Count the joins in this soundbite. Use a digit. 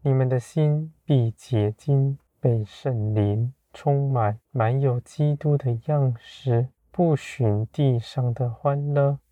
3